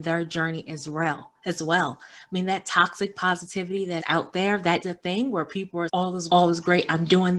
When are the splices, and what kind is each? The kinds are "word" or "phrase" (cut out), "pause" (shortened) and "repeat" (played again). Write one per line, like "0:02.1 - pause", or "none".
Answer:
0:04.0 - word
0:04.8 - word
0:05.9 - word
0:06.3 - word